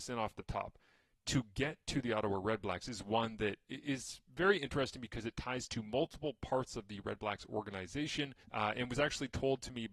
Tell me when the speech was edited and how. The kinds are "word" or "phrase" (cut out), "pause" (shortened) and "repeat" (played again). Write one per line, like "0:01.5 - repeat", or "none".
0:08.4 - pause